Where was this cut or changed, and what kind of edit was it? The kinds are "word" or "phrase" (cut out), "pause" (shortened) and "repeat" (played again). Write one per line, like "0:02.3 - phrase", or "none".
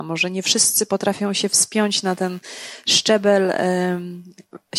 none